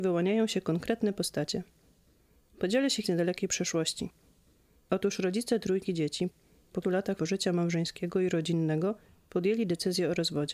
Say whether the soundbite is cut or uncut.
cut